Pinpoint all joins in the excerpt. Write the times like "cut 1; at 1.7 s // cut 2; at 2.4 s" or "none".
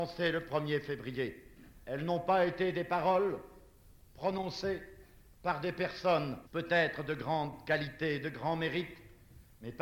cut 1; at 1.6 s // cut 2; at 6.5 s

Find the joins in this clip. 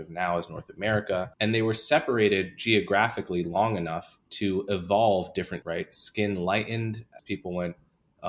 cut 1; at 1.3 s // cut 2; at 4.2 s // cut 3; at 5.6 s // cut 4; at 7.2 s

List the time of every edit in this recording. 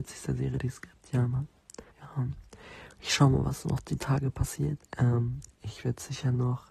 cut 1; at 1.9 s // cut 2; at 4.9 s

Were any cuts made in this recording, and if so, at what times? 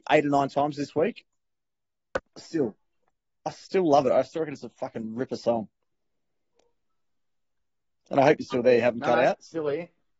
cut 1; at 2.3 s

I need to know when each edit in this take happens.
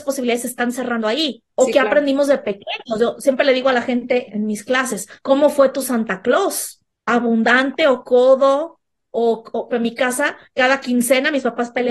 cut 1; at 1.5 s // cut 2; at 4.3 s // cut 3; at 5.2 s // cut 4; at 6.9 s // cut 5; at 9.7 s // cut 6; at 10.5 s

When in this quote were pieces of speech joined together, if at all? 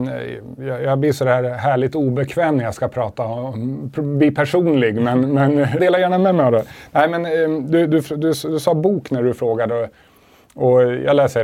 cut 1; at 5.8 s

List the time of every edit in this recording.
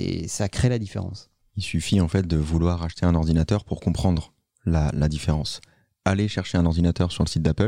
none

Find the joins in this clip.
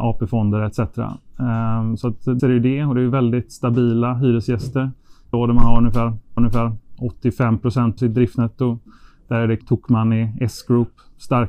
cut 1; at 2.4 s // cut 2; at 5.3 s // cut 3; at 6.4 s // cut 4; at 8.0 s // cut 5; at 9.6 s

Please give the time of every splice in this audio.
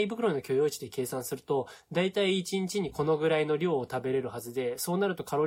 none

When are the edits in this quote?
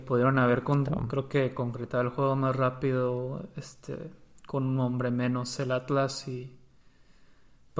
none

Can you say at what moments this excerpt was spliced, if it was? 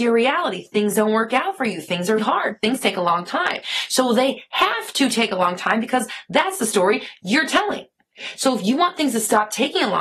cut 1; at 2.2 s

